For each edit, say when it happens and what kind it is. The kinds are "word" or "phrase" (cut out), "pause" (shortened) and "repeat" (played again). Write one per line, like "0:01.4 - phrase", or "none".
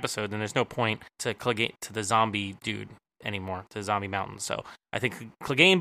0:01.1 - pause
0:01.8 - word
0:04.8 - pause